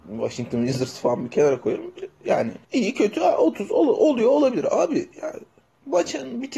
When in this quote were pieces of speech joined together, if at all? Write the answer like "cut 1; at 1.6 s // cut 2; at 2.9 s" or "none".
cut 1; at 2.6 s // cut 2; at 5.1 s